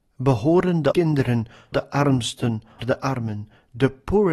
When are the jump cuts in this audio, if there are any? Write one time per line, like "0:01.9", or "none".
0:00.9
0:01.7
0:02.8